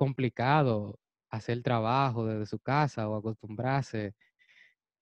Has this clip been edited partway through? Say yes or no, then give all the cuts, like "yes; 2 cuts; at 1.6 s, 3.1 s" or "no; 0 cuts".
no; 0 cuts